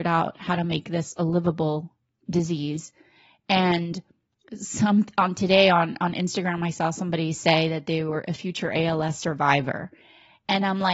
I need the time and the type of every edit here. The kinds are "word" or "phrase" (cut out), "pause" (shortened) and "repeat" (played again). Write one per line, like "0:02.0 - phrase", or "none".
none